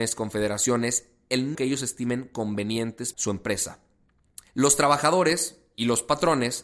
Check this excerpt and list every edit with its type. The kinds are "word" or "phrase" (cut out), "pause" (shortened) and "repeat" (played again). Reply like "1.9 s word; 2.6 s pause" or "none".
1.5 s word; 3.1 s word; 4.5 s pause